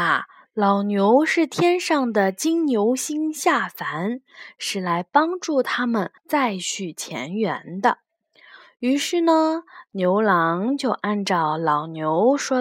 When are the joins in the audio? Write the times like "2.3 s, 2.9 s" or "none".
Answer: 6.2 s